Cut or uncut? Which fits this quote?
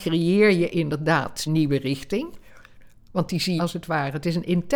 cut